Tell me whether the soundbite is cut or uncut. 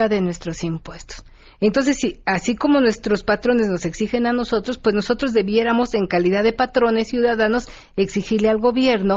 uncut